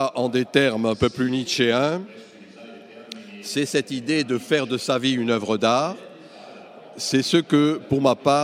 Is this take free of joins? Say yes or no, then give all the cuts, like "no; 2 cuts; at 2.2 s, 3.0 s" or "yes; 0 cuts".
yes; 0 cuts